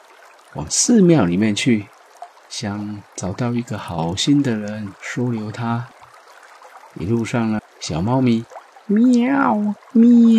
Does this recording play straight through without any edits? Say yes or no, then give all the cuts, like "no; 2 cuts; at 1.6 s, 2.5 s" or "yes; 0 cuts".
no; 1 cut; at 7.6 s